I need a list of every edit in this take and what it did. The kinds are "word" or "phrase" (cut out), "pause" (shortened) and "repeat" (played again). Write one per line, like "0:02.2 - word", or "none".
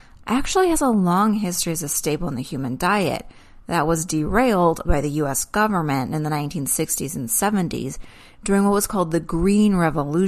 0:04.8 - word